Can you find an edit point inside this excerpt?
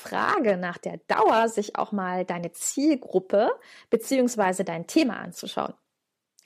no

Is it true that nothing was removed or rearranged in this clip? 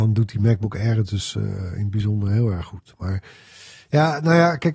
yes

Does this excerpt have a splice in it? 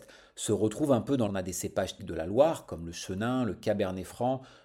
yes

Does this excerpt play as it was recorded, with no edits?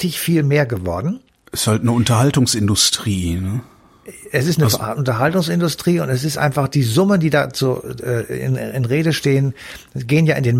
yes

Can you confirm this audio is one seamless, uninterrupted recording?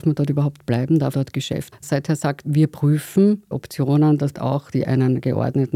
no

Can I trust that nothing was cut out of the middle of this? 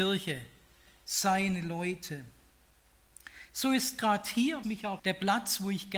no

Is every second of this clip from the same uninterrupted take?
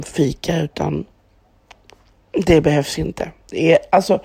yes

